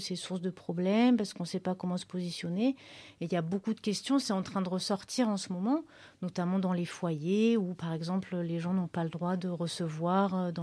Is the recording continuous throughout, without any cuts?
yes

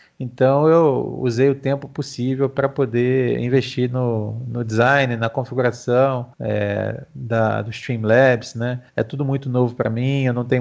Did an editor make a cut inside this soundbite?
yes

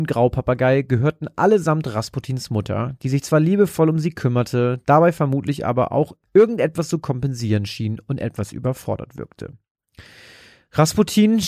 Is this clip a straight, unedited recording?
yes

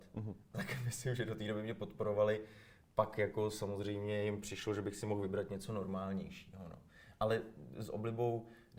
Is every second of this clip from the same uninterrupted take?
yes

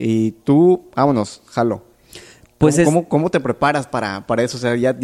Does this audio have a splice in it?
no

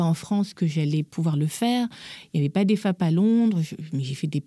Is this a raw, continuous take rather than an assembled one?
yes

